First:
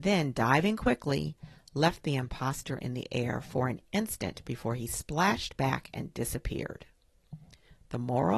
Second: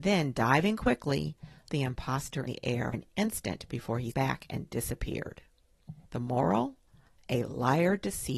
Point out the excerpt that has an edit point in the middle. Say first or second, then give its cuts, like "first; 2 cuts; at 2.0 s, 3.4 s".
second; 5 cuts; at 1.7 s, 2.5 s, 2.9 s, 4.1 s, 6.1 s